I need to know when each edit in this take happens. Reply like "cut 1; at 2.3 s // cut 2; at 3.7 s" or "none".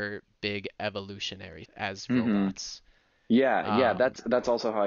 cut 1; at 1.6 s